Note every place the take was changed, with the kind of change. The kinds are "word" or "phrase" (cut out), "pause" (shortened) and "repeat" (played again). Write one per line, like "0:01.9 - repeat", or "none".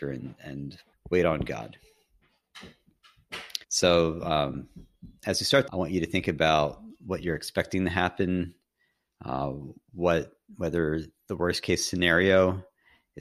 0:00.9 - pause
0:03.6 - pause
0:05.7 - phrase